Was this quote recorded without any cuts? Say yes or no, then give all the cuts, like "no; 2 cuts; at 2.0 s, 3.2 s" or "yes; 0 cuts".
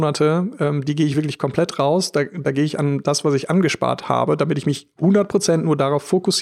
yes; 0 cuts